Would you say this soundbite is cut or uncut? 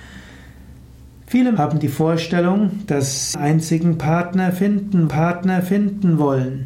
cut